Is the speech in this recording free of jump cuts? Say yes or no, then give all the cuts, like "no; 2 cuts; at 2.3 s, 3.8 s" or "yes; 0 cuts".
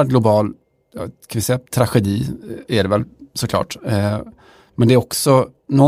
no; 1 cut; at 1.7 s